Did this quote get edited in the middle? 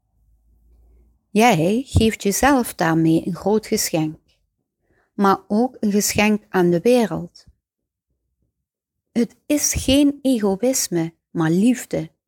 no; 0 cuts

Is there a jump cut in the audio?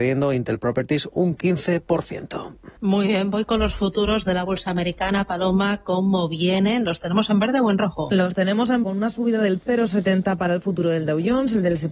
yes; 2 cuts; at 2.8 s, 8.8 s

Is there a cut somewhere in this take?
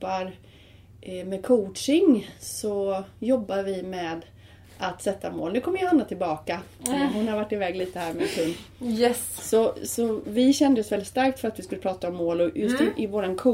no; 0 cuts

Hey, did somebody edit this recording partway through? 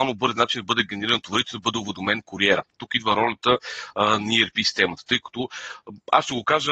no; 0 cuts

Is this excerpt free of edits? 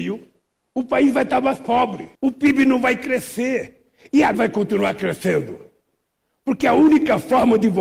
no; 2 cuts; at 2.1 s, 4.3 s

